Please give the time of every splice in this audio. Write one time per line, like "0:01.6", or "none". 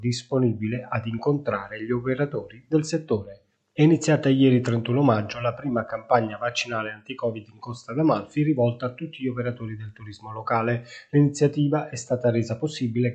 none